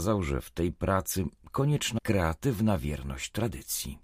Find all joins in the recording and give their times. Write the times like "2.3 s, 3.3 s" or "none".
2.0 s